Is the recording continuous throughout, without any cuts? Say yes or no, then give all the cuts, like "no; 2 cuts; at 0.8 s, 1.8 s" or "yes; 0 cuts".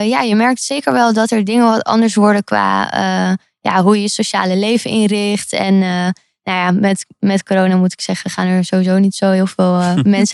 yes; 0 cuts